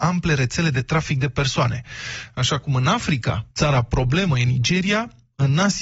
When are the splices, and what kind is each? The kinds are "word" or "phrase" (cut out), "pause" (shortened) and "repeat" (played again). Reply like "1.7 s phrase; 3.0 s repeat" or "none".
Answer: 3.5 s pause

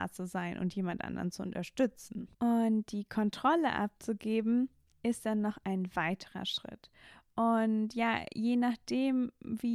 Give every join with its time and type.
2.3 s pause; 4.9 s pause

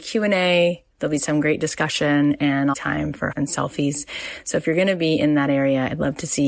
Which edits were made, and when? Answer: 2.7 s word; 3.3 s word

